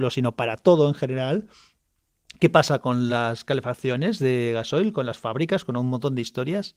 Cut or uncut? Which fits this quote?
uncut